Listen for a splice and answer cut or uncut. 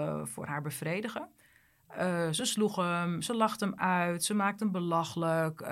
uncut